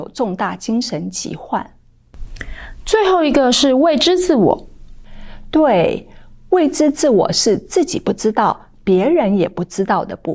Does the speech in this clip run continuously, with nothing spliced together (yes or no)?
yes